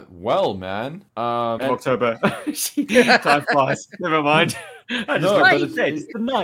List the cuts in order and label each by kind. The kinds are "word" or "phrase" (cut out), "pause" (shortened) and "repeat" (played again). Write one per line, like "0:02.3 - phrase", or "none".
0:01.1 - pause
0:01.6 - phrase

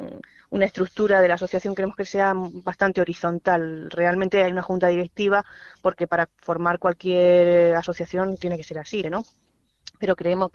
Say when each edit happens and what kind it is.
0:09.0 - word

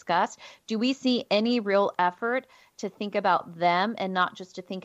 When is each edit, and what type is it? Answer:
none

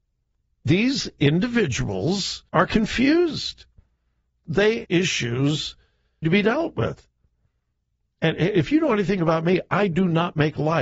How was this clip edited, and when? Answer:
0:02.5 - pause
0:04.4 - word
0:04.8 - phrase
0:06.2 - phrase

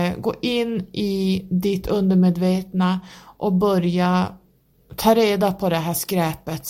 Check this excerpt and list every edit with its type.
none

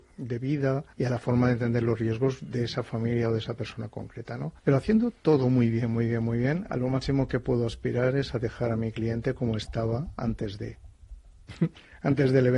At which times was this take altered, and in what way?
0:00.9 - pause
0:04.6 - pause

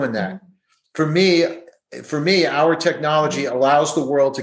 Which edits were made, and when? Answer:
none

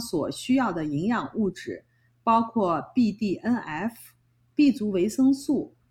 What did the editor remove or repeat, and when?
none

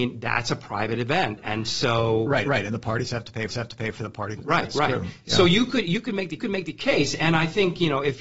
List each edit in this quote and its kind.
0:02.4 - repeat
0:03.5 - repeat
0:04.4 - word
0:06.4 - repeat

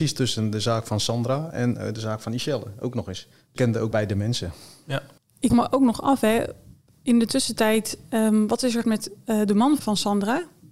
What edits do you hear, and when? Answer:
0:03.6 - word
0:03.9 - word
0:05.5 - word
0:08.8 - word
0:09.8 - word

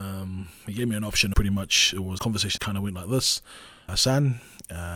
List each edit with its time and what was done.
0:01.3 - word
0:02.2 - word
0:02.6 - word
0:03.9 - word

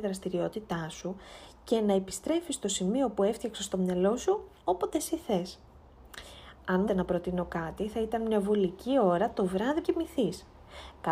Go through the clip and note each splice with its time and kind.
0:06.9 - word
0:09.8 - word

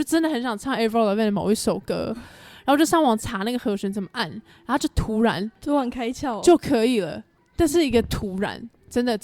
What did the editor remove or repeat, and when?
none

